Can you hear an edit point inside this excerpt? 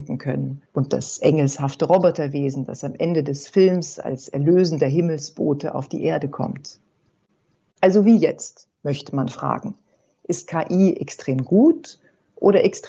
no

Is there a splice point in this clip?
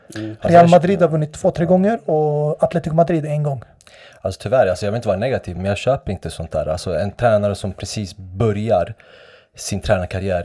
no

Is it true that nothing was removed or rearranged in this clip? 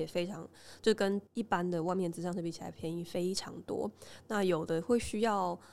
no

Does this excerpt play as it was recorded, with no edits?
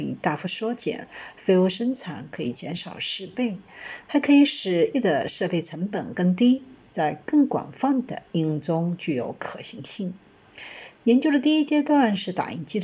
no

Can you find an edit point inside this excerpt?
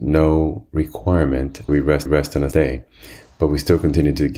yes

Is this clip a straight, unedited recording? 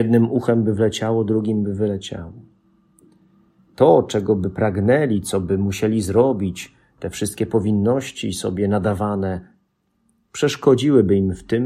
yes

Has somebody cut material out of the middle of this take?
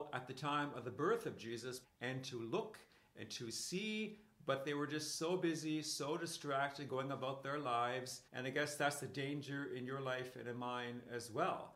yes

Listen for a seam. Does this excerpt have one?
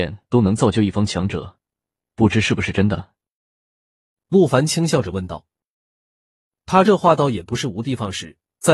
no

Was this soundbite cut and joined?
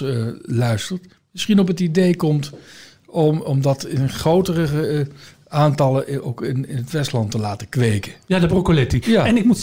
yes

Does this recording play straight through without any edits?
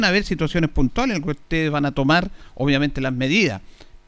yes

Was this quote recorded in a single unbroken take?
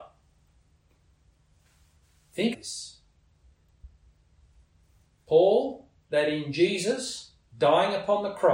no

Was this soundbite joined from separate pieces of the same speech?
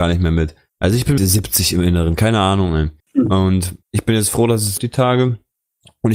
yes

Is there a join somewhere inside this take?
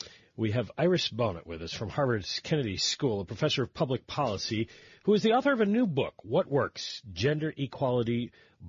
no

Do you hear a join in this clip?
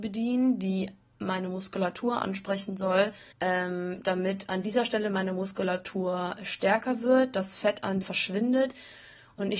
yes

